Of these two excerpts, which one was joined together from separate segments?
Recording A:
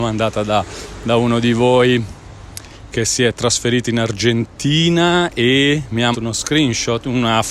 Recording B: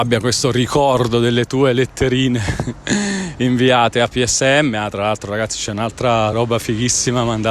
A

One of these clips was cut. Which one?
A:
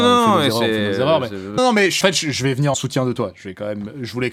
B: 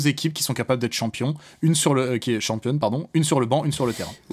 A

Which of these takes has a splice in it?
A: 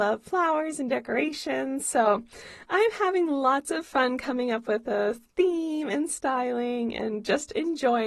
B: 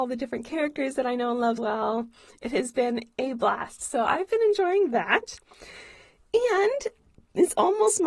B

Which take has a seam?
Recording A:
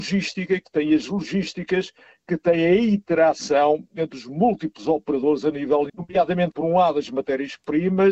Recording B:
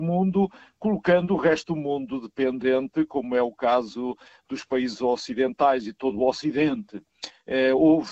A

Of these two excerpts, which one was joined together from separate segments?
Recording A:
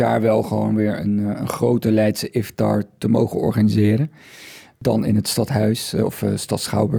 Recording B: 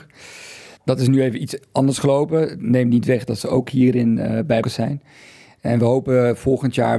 B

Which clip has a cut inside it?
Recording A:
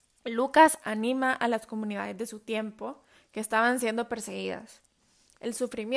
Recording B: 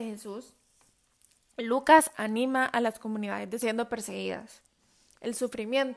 B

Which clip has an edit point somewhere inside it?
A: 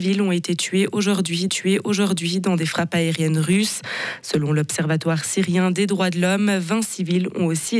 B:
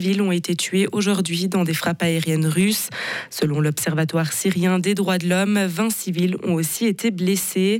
A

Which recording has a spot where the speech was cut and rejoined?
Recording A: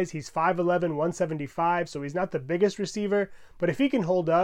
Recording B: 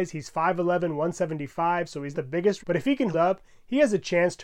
B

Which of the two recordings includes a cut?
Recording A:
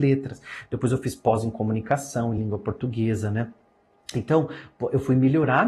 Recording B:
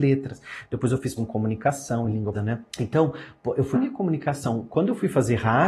B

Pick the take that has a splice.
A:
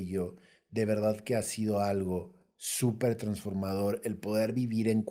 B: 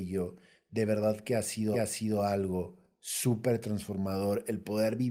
B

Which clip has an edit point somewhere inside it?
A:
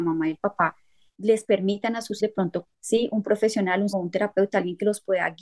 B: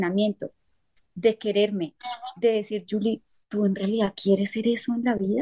A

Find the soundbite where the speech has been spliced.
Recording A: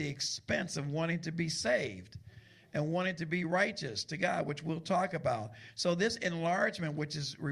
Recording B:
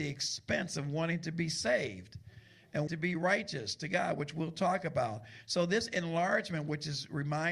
B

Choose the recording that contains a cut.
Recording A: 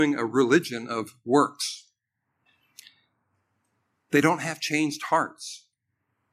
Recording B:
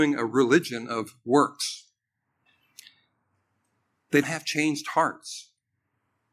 B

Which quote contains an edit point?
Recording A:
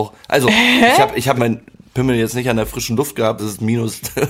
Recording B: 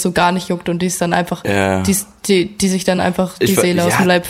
A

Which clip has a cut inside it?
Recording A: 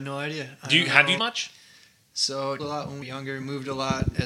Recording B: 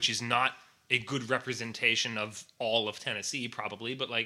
A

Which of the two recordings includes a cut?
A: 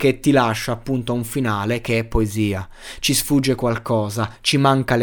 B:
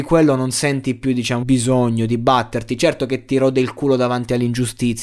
B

